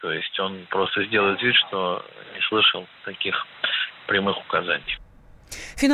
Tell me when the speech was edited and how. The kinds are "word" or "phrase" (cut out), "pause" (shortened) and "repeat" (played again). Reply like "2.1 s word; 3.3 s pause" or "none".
none